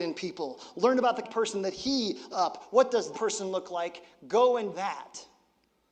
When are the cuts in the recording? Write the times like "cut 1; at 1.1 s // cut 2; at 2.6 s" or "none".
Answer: cut 1; at 1.2 s // cut 2; at 2.3 s // cut 3; at 3.1 s // cut 4; at 4.7 s